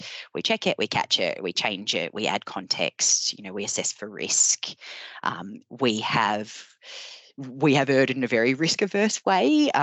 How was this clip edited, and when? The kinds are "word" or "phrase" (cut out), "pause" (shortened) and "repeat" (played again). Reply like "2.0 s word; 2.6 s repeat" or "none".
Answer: none